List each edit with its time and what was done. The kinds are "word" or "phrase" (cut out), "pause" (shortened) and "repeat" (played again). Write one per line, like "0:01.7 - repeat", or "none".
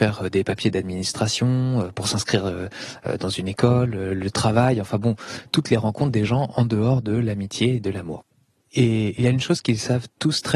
none